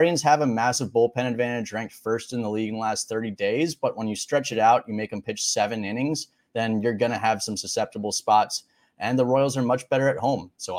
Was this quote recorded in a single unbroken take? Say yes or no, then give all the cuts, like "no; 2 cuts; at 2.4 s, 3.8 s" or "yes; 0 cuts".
yes; 0 cuts